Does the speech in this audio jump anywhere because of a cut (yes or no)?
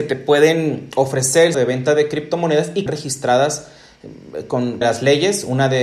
yes